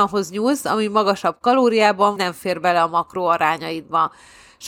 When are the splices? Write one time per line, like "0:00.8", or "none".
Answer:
0:02.2